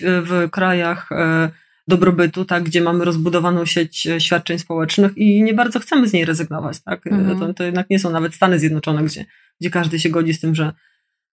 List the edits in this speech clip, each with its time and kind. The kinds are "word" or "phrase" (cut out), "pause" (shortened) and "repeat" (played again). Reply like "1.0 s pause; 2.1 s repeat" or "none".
none

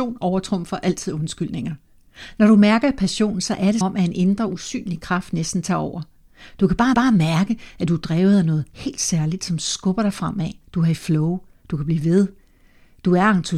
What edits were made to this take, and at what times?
3.8 s word; 6.9 s repeat; 10.6 s pause

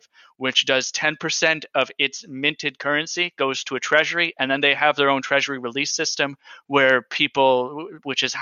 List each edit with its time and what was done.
none

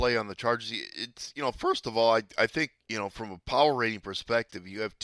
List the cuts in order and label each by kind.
2.8 s pause

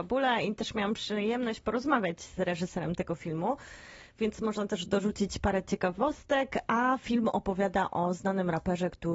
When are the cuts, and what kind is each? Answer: none

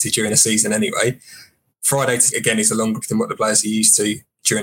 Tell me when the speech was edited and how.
2.3 s word; 3.0 s word

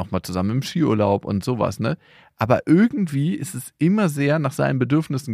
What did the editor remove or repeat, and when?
none

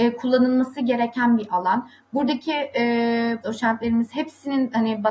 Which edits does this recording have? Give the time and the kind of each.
3.4 s word

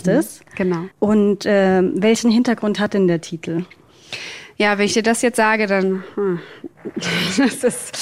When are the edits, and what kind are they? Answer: 0.9 s pause

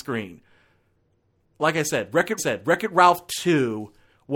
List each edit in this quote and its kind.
2.4 s repeat

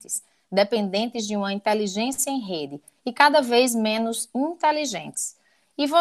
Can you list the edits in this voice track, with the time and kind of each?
none

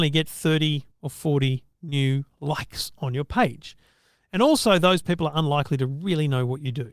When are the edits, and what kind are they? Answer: 0.9 s pause; 1.7 s pause

